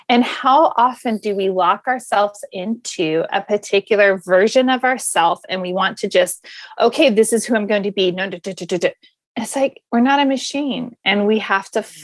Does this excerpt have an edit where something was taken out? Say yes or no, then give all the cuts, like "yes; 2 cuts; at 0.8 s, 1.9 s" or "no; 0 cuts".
yes; 1 cut; at 9.9 s